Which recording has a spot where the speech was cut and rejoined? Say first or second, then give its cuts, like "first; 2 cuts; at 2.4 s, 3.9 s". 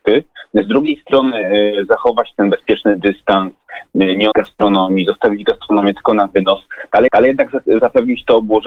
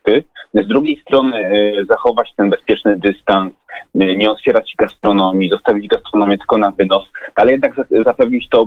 first; 2 cuts; at 4.3 s, 7.1 s